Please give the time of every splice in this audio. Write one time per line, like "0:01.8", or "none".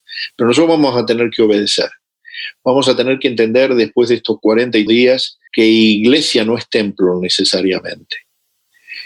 0:04.9
0:05.5